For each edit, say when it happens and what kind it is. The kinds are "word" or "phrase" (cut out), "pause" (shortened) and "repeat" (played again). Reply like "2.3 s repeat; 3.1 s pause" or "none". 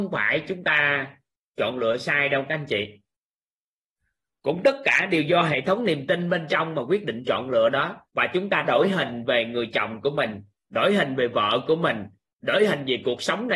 8.1 s pause; 8.6 s word